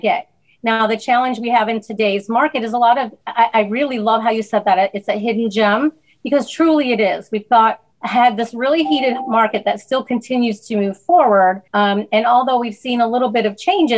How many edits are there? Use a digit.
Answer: 3